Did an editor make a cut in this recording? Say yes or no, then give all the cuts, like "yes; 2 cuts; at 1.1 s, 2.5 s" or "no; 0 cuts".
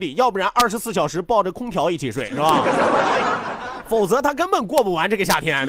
no; 0 cuts